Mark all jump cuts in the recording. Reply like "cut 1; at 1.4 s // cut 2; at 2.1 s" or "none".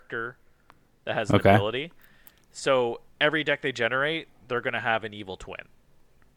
cut 1; at 3.1 s